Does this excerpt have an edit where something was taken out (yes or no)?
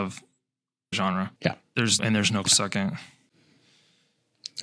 yes